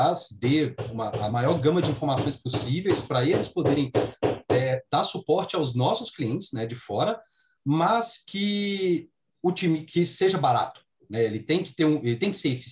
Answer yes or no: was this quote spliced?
no